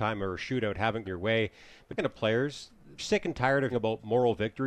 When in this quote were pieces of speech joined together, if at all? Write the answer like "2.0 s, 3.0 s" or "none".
1.0 s, 2.0 s, 3.0 s, 3.7 s